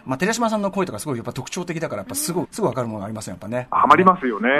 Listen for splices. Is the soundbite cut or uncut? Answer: cut